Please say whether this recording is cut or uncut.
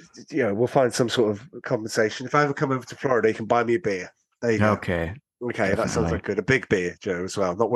uncut